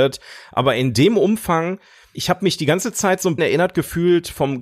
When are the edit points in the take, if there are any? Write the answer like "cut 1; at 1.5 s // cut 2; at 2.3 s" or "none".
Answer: cut 1; at 2.1 s // cut 2; at 3.4 s